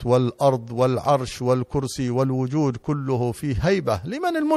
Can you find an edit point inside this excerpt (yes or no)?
no